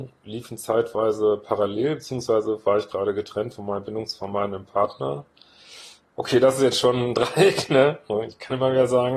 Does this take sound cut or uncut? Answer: uncut